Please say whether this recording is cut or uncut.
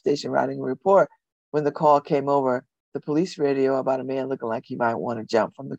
uncut